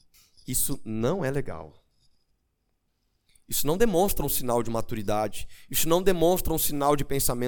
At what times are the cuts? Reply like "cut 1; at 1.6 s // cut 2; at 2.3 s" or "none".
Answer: none